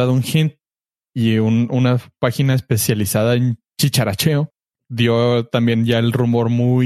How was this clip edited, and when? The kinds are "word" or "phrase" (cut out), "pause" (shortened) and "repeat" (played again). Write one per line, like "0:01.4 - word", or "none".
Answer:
none